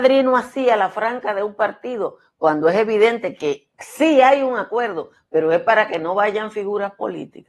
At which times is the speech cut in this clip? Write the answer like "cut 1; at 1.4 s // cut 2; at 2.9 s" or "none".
cut 1; at 3.7 s